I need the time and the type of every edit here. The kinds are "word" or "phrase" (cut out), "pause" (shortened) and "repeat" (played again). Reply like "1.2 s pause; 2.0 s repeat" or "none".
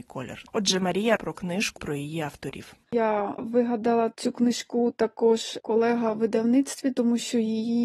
1.2 s word; 1.8 s word; 3.4 s word; 5.6 s word